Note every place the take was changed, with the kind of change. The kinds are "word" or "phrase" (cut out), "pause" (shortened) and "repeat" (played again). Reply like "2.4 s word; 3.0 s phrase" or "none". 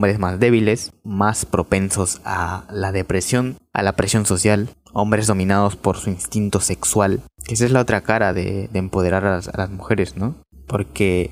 none